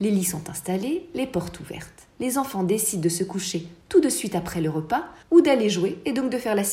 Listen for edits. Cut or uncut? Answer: cut